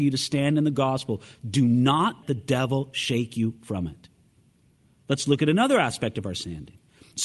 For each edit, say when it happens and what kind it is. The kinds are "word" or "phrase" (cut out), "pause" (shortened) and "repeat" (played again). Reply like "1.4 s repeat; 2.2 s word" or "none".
2.2 s word